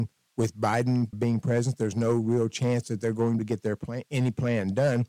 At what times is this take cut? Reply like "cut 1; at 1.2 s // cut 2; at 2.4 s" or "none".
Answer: cut 1; at 1.1 s // cut 2; at 3.4 s

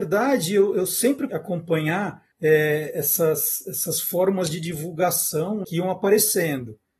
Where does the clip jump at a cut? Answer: cut 1; at 1.3 s // cut 2; at 2.3 s // cut 3; at 5.6 s

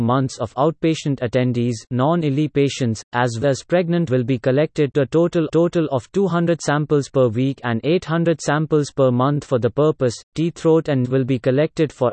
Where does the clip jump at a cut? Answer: cut 1; at 3.4 s // cut 2; at 4.1 s // cut 3; at 4.9 s // cut 4; at 5.5 s // cut 5; at 11.0 s

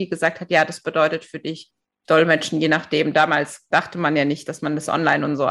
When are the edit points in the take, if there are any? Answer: none

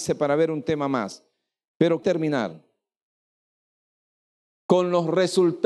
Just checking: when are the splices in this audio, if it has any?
cut 1; at 2.0 s

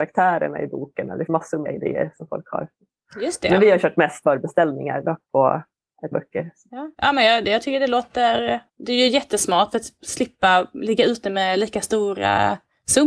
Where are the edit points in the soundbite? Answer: cut 1; at 1.3 s // cut 2; at 1.6 s // cut 3; at 4.2 s // cut 4; at 6.1 s // cut 5; at 6.9 s // cut 6; at 8.7 s

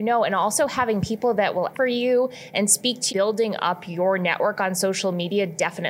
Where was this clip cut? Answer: cut 1; at 1.7 s // cut 2; at 3.1 s

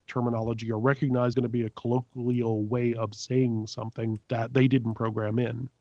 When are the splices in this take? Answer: cut 1; at 1.3 s // cut 2; at 4.2 s

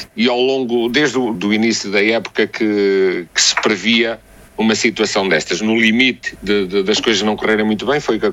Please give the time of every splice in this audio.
cut 1; at 1.3 s

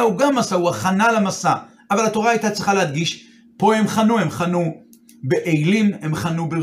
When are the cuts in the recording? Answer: none

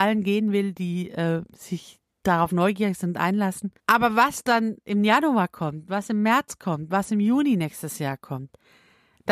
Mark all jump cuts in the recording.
cut 1; at 3.8 s

